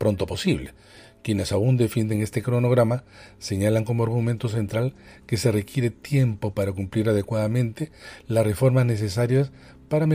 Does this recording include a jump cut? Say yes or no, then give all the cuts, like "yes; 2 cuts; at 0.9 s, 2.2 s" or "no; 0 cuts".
no; 0 cuts